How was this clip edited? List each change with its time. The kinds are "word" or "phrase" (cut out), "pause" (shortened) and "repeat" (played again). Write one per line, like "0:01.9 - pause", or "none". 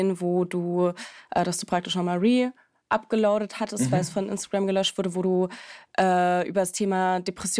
none